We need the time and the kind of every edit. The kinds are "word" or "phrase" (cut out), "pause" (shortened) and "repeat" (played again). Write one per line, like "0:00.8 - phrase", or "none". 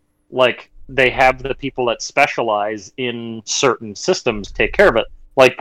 none